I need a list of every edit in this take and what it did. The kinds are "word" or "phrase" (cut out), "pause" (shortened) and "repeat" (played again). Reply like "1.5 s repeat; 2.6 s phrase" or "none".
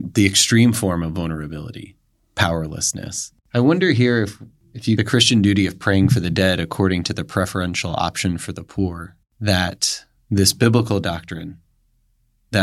3.4 s pause; 5.0 s phrase